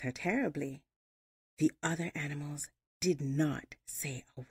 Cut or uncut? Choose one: uncut